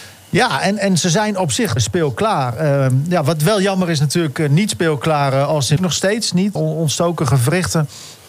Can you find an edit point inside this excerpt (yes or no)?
yes